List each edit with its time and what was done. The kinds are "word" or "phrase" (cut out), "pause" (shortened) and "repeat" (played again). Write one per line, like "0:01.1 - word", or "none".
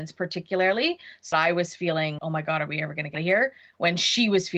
0:01.3 - word
0:02.2 - word
0:03.1 - word